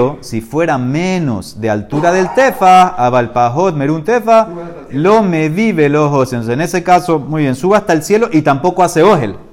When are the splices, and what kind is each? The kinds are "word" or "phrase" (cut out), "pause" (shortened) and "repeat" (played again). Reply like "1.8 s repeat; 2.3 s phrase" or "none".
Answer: none